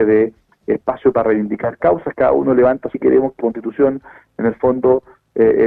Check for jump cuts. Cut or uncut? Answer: cut